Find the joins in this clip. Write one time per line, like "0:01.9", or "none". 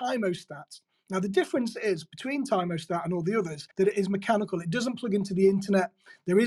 0:03.7